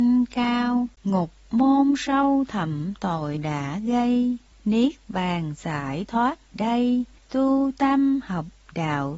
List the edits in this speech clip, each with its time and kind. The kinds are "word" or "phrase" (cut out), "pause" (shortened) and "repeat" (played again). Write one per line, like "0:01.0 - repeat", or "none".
0:01.0 - pause
0:03.4 - word
0:04.5 - pause
0:06.5 - word
0:07.2 - pause